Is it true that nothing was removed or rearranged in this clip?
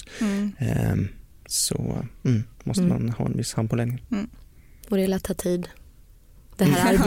yes; 0 cuts

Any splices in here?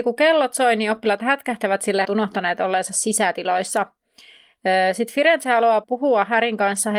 yes; 2 cuts; at 2.0 s, 5.8 s

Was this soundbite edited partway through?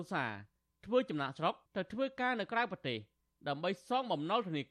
yes; 1 cut; at 1.6 s

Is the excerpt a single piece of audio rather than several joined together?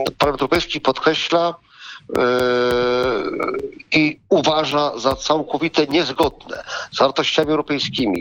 yes; 0 cuts

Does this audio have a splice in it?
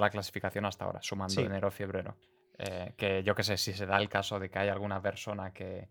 no; 0 cuts

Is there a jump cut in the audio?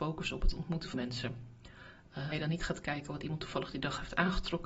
yes; 2 cuts; at 0.9 s, 2.3 s

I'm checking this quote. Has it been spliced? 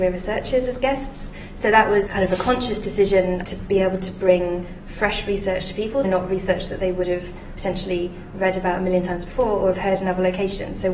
yes; 3 cuts; at 2.1 s, 3.4 s, 6.0 s

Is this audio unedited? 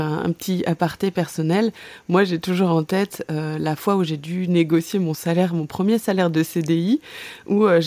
yes; 0 cuts

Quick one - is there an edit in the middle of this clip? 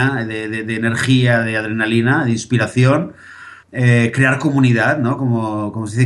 yes; 1 cut; at 3.6 s

